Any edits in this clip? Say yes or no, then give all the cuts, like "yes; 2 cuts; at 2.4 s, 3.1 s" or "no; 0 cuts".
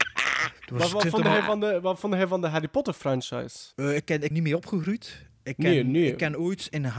yes; 2 cuts; at 3.7 s, 4.3 s